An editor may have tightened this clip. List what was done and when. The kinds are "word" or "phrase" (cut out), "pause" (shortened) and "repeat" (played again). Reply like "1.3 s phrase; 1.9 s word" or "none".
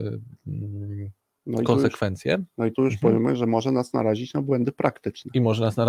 2.7 s word